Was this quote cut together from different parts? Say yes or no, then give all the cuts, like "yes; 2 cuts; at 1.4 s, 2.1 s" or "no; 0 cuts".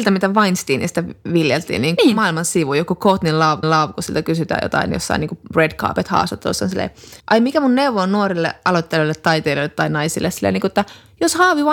yes; 3 cuts; at 2.0 s, 3.6 s, 7.2 s